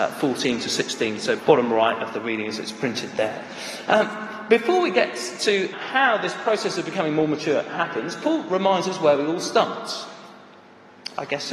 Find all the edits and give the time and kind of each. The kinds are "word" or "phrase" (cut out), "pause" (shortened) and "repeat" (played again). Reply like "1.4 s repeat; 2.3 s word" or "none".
1.4 s word; 5.7 s word